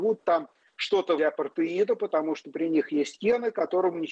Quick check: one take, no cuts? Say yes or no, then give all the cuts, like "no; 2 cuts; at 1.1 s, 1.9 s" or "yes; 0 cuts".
no; 1 cut; at 1.2 s